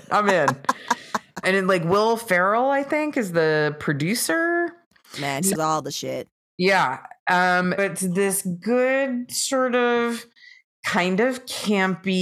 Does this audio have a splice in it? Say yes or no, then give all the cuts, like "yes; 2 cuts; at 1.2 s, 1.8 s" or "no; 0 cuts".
yes; 3 cuts; at 1.4 s, 5.5 s, 7.8 s